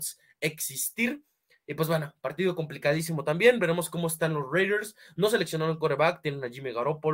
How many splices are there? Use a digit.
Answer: 0